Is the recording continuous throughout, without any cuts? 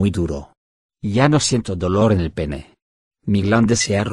yes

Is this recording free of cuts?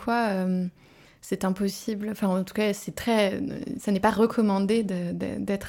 yes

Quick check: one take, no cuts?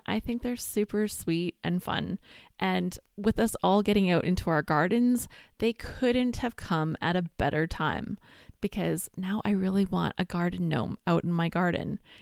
yes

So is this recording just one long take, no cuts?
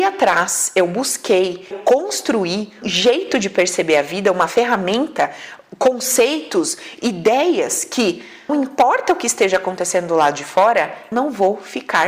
no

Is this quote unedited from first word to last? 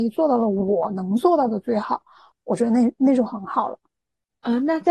yes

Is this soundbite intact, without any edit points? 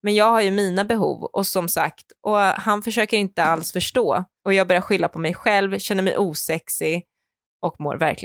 yes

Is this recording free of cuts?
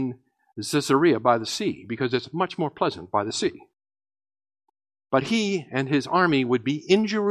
yes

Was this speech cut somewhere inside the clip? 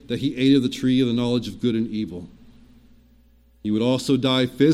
no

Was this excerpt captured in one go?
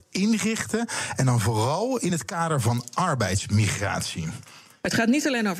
yes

